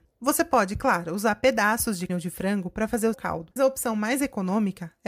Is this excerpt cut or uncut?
cut